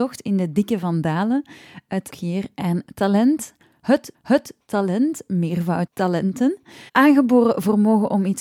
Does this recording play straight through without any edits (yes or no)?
no